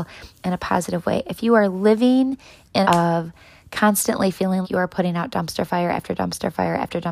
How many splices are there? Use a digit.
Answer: 2